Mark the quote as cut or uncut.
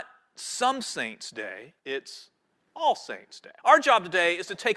cut